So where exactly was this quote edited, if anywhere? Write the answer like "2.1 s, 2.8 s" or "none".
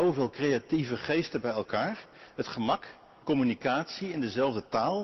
3.2 s